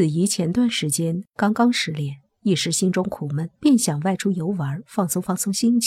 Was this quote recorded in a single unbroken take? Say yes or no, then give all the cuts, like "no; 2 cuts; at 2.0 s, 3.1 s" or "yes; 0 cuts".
no; 1 cut; at 3.6 s